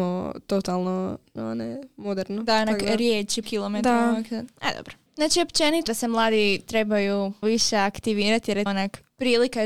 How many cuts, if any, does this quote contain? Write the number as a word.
five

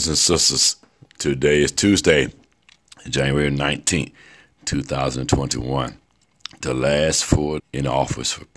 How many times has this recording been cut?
one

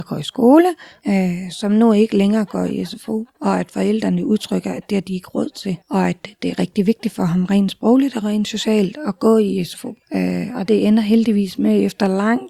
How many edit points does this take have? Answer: two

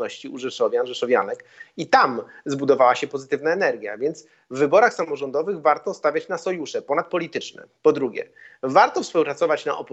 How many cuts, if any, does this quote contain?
zero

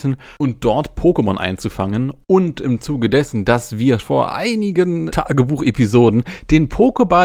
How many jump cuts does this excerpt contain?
two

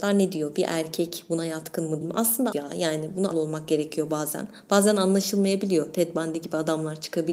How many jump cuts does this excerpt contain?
three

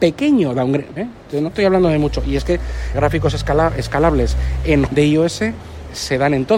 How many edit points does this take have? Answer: four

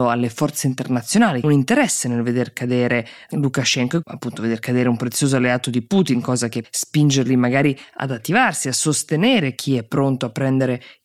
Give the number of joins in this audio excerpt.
three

